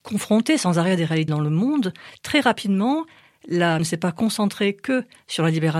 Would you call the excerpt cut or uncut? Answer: cut